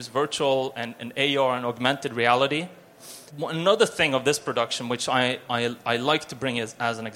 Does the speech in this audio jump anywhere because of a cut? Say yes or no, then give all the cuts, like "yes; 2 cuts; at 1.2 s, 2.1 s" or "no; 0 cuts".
yes; 1 cut; at 3.3 s